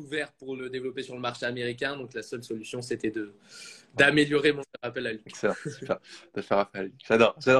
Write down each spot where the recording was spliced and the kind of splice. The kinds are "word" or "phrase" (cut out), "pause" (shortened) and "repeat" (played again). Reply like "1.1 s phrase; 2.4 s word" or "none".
4.6 s word